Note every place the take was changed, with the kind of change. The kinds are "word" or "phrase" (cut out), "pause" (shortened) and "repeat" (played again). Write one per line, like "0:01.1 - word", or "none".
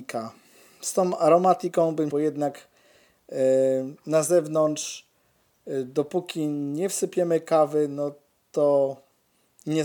0:02.1 - phrase